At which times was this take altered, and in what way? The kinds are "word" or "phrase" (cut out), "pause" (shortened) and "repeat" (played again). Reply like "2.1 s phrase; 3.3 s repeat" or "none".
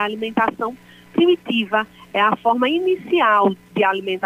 none